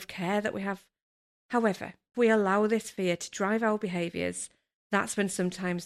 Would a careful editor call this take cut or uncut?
cut